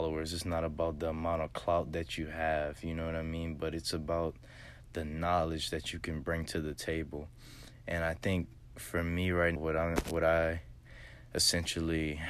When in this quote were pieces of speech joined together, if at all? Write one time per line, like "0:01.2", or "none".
0:09.6